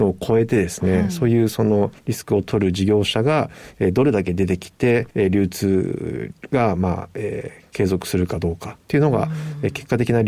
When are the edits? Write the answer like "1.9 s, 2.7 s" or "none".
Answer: 2.0 s, 5.1 s